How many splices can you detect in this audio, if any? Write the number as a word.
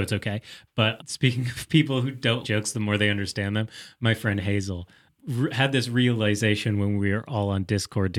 two